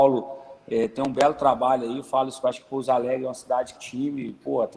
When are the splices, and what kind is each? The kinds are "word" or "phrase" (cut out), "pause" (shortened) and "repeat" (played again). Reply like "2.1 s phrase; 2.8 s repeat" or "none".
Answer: 2.4 s phrase; 3.7 s word

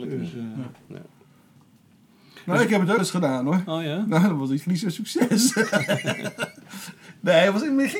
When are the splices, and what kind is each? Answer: 3.0 s word

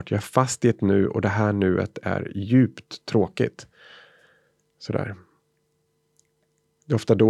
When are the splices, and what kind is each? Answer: none

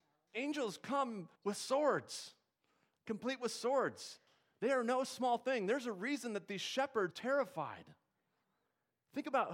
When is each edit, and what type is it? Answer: 1.4 s pause; 7.1 s word

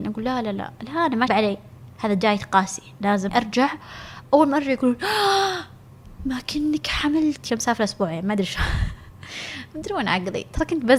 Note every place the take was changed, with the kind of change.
1.3 s phrase; 3.3 s word; 7.5 s phrase

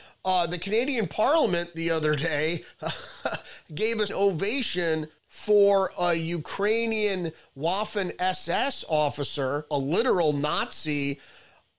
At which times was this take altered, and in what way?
4.1 s word; 5.2 s pause; 9.7 s word

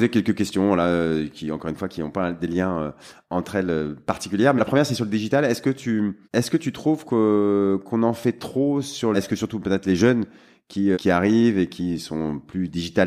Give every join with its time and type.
4.6 s word; 6.2 s pause; 9.1 s phrase; 10.9 s word

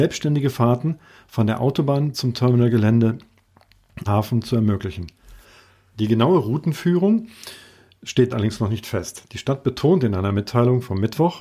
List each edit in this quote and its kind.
2.1 s word; 4.1 s word; 8.3 s word

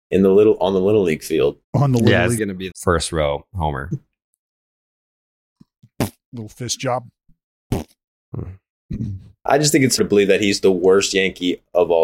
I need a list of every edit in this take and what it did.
1.6 s pause; 2.4 s word; 2.7 s phrase; 10.0 s word

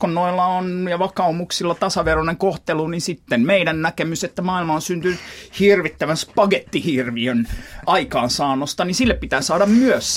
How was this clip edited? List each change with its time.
7.8 s word

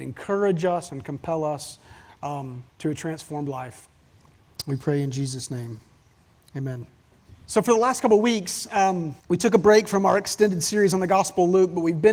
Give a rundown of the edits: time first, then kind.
2.7 s pause; 7.3 s pause; 9.2 s pause

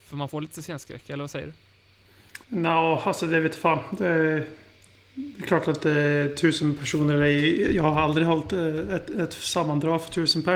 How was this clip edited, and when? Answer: 2.4 s pause

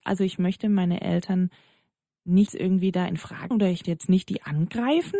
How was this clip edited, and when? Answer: 2.5 s word; 3.5 s word; 3.8 s word

